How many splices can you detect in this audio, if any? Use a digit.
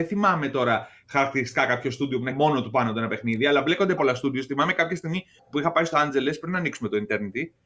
4